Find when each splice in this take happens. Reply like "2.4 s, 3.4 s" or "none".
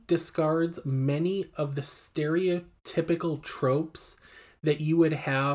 none